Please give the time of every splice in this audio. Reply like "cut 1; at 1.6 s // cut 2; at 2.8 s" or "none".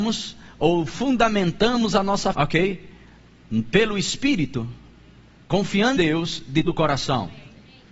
cut 1; at 2.3 s // cut 2; at 6.0 s // cut 3; at 6.6 s